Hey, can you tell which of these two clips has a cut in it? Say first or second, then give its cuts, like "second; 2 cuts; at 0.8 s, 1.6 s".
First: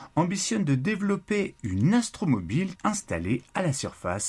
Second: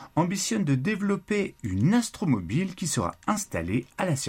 first; 1 cut; at 2.7 s